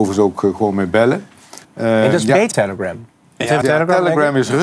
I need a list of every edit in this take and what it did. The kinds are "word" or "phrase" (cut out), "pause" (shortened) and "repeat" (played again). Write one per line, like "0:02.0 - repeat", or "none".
0:01.6 - pause
0:02.5 - word
0:03.6 - word